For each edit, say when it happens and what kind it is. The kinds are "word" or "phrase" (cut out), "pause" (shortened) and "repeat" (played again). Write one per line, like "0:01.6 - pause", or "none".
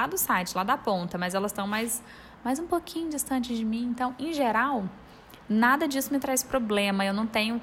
none